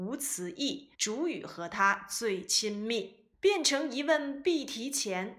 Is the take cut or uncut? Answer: cut